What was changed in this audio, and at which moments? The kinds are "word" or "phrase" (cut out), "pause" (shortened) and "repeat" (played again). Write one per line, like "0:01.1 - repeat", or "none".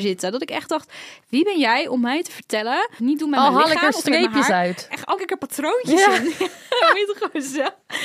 0:03.0 - phrase
0:05.2 - word